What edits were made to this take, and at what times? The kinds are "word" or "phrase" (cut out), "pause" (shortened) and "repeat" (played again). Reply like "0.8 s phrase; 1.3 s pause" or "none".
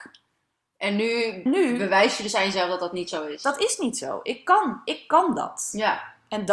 1.5 s word